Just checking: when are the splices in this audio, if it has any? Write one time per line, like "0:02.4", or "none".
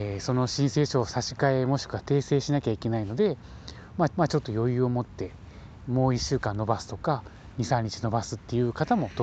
0:04.1